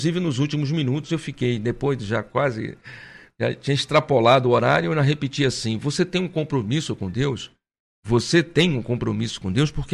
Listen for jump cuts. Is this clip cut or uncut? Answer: uncut